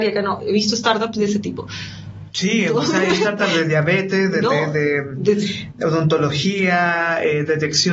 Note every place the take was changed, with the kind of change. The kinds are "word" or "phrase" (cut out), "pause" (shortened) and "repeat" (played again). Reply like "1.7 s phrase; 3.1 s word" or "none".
none